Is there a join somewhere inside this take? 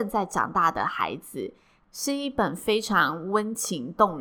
no; 0 cuts

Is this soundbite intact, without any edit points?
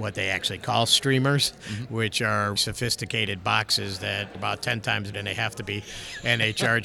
no; 3 cuts; at 2.6 s, 4.3 s, 5.1 s

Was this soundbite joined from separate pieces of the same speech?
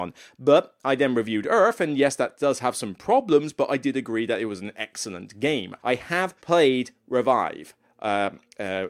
yes; 2 cuts; at 5.8 s, 6.4 s

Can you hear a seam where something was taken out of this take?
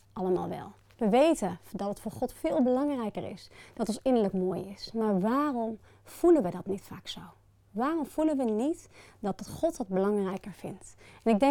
no; 0 cuts

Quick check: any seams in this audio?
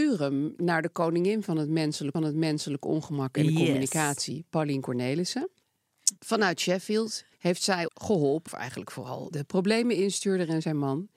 yes; 6 cuts; at 2.1 s, 6.2 s, 7.3 s, 7.9 s, 8.5 s, 9.3 s

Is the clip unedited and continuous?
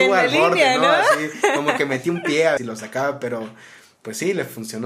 no; 1 cut; at 2.6 s

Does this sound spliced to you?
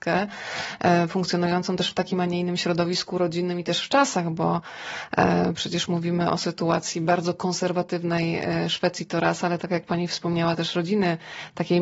no; 0 cuts

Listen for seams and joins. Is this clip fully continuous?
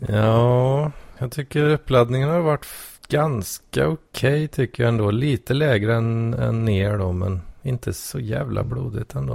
no; 2 cuts; at 1.2 s, 3.0 s

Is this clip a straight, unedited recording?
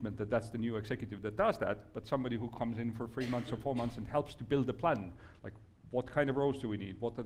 yes; 0 cuts

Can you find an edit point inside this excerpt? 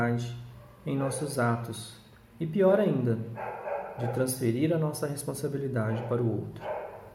no; 0 cuts

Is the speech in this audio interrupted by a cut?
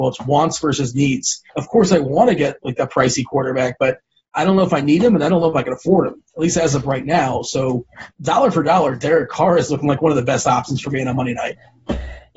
yes; 2 cuts; at 1.5 s, 8.1 s

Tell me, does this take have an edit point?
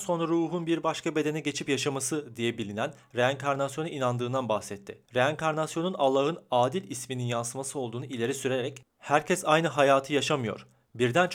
yes; 2 cuts; at 5.0 s, 8.9 s

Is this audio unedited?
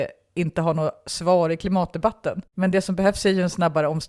no; 1 cut; at 2.5 s

